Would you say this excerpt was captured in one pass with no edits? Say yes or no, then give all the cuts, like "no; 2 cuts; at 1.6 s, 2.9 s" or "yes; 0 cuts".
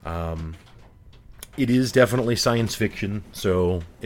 yes; 0 cuts